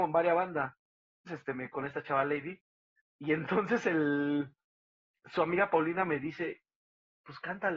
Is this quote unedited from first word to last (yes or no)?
no